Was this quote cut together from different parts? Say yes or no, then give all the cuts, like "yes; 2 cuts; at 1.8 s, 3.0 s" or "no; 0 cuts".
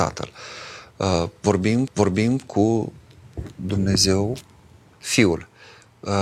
yes; 2 cuts; at 1.9 s, 4.9 s